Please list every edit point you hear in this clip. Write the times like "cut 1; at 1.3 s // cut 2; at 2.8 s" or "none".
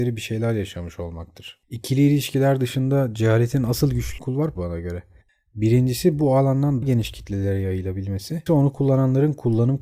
cut 1; at 4.2 s // cut 2; at 4.5 s // cut 3; at 6.8 s // cut 4; at 8.5 s